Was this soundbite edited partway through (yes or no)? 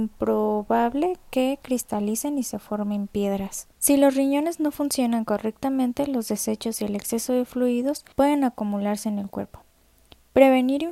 yes